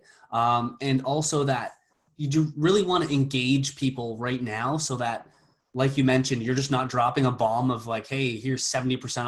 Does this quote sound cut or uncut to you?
uncut